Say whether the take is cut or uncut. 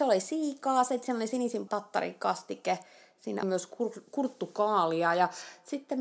cut